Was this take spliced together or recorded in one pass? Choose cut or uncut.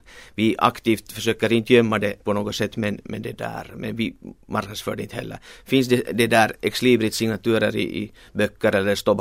cut